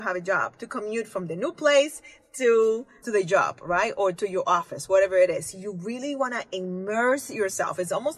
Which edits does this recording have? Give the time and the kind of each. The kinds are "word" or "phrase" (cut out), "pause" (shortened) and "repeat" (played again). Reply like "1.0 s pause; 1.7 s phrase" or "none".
3.0 s word